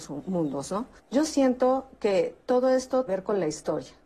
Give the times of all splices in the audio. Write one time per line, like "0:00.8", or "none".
0:01.0
0:02.4
0:03.1